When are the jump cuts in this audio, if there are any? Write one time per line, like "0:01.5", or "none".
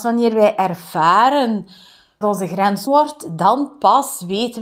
0:02.2
0:02.9

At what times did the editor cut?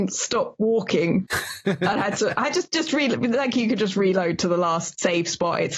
none

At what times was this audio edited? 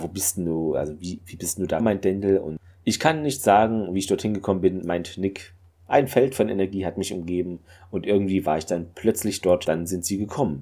0:01.8

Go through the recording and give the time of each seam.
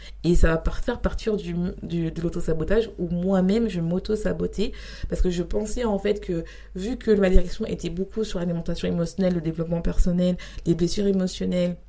none

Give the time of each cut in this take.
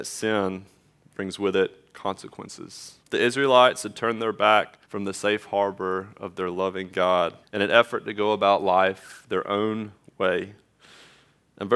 0:03.0
0:04.8
0:07.4

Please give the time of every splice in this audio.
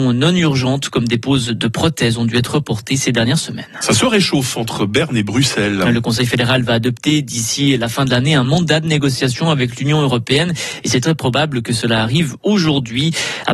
none

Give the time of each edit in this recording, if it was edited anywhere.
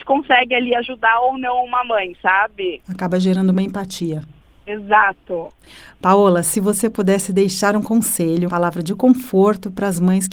0:08.5

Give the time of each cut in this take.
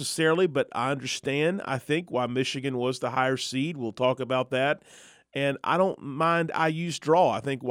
none

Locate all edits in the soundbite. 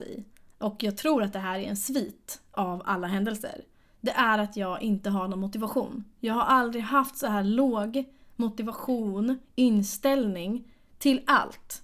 0:09.4

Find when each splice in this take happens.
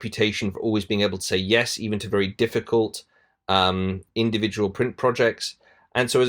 none

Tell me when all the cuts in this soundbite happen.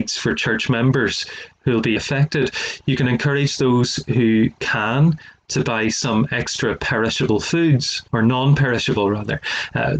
0:02.0
0:08.1

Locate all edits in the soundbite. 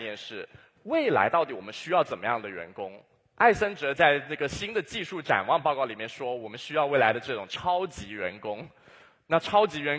none

